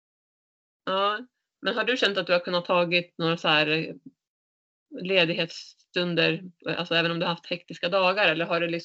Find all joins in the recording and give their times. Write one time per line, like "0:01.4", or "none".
none